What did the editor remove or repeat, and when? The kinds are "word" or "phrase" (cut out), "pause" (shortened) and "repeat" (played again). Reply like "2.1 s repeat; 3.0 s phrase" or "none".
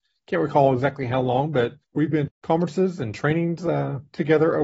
1.8 s pause; 2.3 s phrase